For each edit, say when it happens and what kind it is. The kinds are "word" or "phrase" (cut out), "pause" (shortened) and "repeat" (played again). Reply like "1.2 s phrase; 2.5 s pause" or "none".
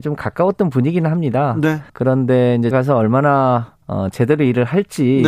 1.9 s pause; 2.7 s word; 3.8 s pause